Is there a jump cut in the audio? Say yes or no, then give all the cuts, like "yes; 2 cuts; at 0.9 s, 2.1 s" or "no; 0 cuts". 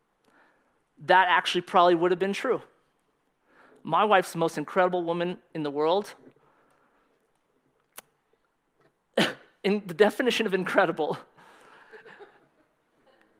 no; 0 cuts